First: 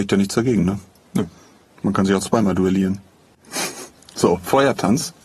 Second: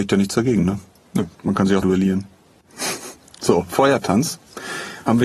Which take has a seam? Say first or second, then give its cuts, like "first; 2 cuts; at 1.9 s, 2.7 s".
second; 2 cuts; at 1.3 s, 1.8 s